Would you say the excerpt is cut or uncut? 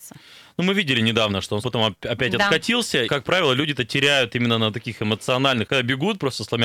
cut